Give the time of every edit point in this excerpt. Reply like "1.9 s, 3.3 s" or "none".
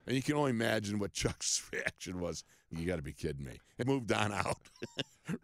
2.7 s, 3.8 s